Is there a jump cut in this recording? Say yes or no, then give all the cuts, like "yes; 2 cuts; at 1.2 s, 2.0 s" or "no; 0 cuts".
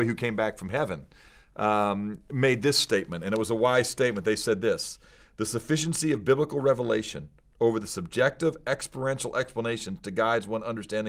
no; 0 cuts